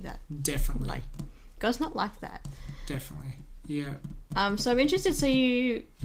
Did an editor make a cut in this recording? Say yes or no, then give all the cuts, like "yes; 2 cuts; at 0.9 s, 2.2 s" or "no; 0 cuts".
no; 0 cuts